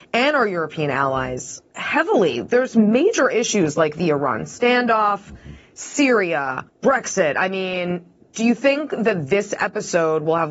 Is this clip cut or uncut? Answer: cut